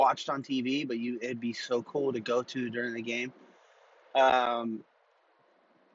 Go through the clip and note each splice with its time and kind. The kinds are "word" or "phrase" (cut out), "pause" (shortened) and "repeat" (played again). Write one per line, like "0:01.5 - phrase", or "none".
none